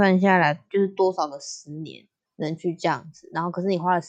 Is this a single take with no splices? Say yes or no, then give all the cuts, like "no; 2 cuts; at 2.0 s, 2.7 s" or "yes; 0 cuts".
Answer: no; 1 cut; at 2.3 s